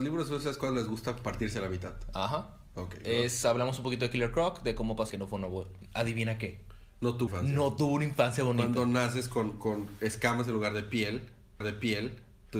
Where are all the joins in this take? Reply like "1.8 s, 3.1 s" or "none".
5.1 s, 7.3 s, 11.6 s

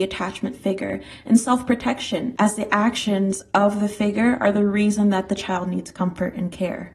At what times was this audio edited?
none

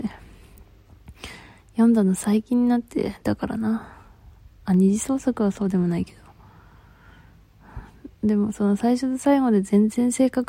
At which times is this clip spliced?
none

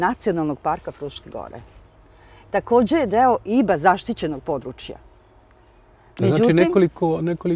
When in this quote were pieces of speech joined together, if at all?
none

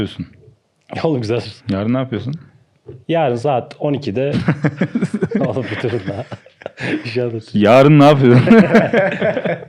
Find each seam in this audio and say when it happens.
1.6 s, 3.0 s

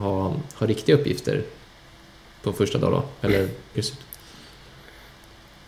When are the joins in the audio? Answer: 3.7 s

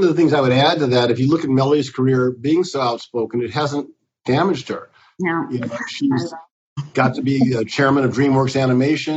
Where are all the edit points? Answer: none

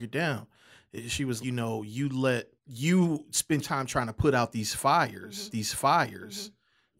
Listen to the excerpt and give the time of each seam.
1.4 s, 2.6 s, 3.6 s, 5.5 s

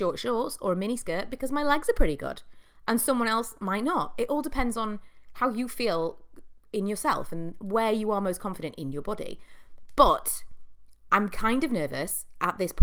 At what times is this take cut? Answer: none

